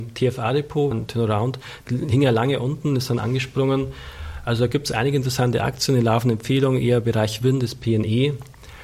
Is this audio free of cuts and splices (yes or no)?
no